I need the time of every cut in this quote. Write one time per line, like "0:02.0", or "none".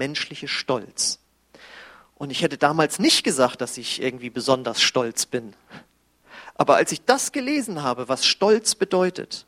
none

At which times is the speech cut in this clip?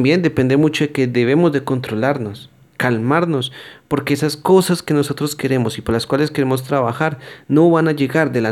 none

